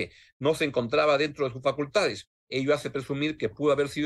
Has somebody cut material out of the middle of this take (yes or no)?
no